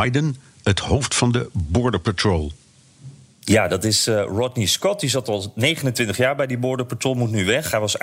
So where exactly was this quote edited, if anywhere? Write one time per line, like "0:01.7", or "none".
none